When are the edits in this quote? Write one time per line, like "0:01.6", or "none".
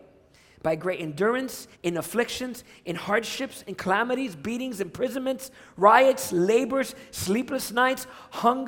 0:01.7